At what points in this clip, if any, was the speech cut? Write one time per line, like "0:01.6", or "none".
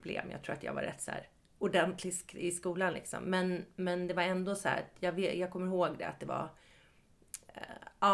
none

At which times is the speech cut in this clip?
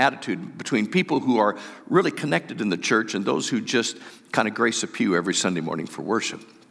none

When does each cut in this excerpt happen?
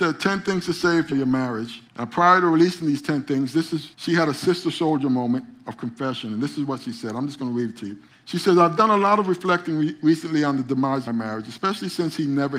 0:01.1
0:01.9
0:03.9
0:08.1
0:11.1

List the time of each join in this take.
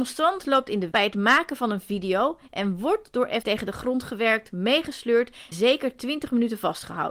0:00.9
0:03.4
0:05.5

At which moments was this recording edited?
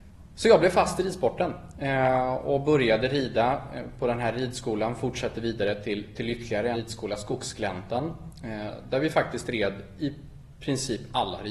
0:06.7

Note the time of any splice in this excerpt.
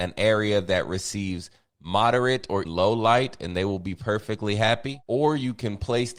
0:02.6

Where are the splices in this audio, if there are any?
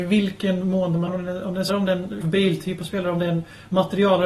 0:01.1
0:01.7
0:02.2

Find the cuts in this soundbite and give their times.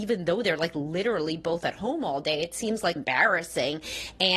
0:03.0

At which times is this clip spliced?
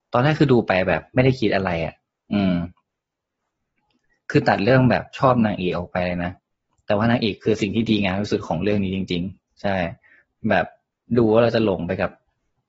none

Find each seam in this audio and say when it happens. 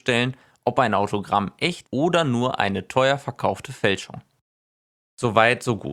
0:01.8

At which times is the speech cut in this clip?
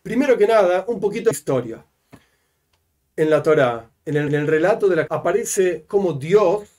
0:01.3
0:04.3
0:05.1

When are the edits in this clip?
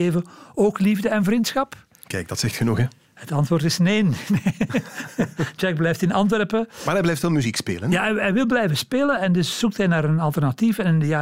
none

